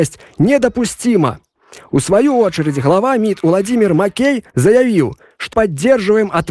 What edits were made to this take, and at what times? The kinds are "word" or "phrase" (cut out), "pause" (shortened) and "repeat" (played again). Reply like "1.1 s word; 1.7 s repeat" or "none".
4.5 s pause; 5.5 s word

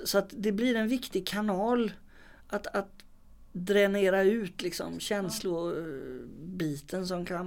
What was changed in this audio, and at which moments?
3.5 s pause

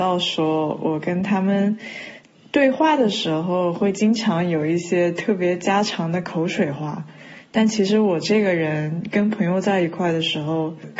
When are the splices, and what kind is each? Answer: none

